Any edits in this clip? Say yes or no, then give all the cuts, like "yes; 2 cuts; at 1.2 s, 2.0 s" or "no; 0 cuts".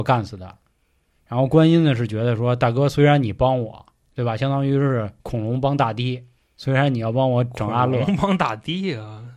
no; 0 cuts